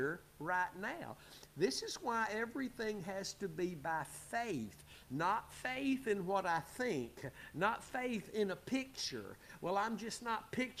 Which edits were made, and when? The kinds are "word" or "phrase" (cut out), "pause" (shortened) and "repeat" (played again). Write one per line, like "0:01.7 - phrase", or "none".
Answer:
none

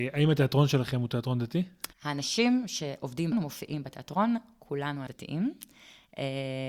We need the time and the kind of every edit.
0:01.9 - pause
0:03.3 - word
0:05.1 - word

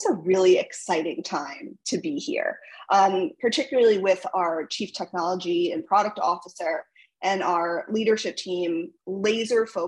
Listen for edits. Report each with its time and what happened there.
none

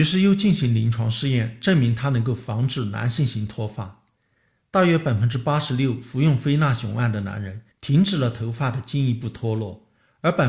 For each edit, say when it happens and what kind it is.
0:07.7 - pause

